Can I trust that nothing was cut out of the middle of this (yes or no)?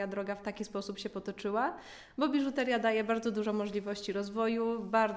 yes